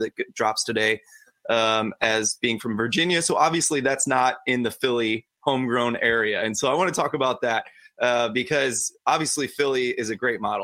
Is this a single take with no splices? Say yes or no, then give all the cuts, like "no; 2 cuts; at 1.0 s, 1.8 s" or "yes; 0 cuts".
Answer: yes; 0 cuts